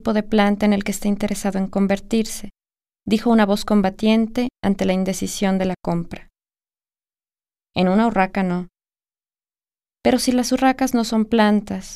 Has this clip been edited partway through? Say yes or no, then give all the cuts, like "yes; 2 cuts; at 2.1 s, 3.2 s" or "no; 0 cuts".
no; 0 cuts